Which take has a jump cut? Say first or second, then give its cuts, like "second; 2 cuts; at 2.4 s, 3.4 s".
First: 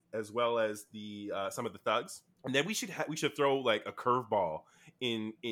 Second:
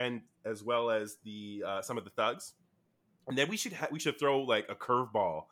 first; 1 cut; at 2.3 s